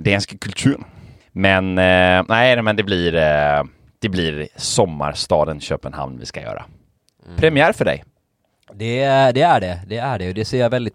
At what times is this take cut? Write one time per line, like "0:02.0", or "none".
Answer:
none